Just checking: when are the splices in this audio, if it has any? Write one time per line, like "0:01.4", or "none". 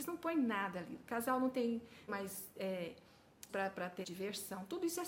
0:02.1
0:03.5
0:04.0